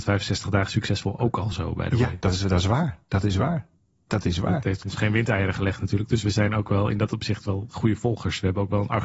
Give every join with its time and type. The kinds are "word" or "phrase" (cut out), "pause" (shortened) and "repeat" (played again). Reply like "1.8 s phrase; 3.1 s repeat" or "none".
none